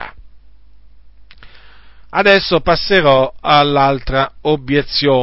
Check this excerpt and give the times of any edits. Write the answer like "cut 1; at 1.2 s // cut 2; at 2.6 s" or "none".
cut 1; at 2.0 s